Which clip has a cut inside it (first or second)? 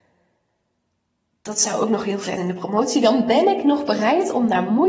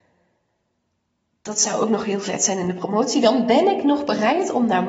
first